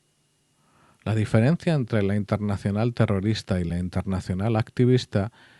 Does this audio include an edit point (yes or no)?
no